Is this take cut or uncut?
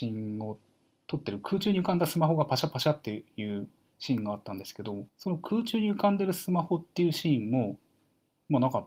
cut